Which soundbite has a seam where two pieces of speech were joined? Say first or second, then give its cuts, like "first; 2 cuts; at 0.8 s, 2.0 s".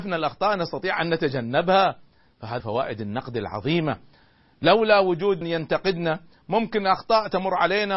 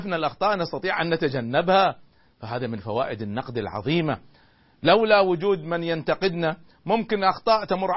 first; 2 cuts; at 2.6 s, 5.4 s